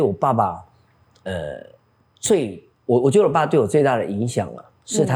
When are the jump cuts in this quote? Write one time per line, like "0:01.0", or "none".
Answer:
0:02.7